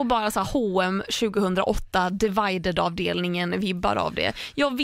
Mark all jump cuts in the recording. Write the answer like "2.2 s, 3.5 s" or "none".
none